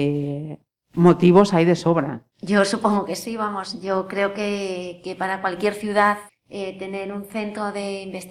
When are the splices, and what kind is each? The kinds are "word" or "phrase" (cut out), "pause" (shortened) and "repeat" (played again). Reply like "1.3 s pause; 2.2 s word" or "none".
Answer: 2.3 s pause; 6.3 s pause